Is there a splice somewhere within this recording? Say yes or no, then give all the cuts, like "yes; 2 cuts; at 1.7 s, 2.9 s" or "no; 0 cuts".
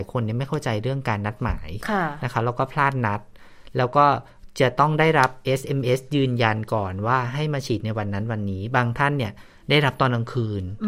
no; 0 cuts